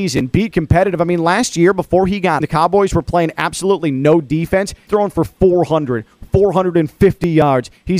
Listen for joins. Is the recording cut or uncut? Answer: cut